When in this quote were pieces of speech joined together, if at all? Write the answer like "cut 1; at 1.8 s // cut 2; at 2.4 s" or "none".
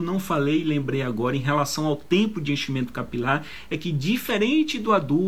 none